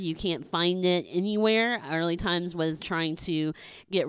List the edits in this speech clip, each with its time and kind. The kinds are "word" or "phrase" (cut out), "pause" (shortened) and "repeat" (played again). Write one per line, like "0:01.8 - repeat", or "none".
0:02.8 - word